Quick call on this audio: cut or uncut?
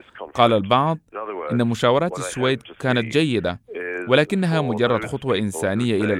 uncut